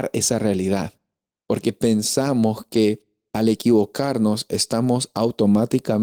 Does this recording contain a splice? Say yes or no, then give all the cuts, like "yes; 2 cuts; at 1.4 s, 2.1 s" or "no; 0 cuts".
no; 0 cuts